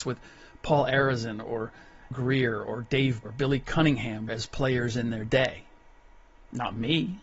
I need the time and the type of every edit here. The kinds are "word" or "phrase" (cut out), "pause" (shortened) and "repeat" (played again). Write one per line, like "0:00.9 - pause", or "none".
0:02.1 - word
0:03.2 - word
0:04.3 - word